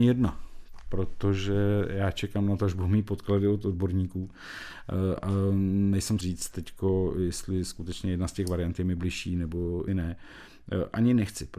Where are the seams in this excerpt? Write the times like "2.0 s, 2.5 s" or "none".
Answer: 6.2 s, 9.9 s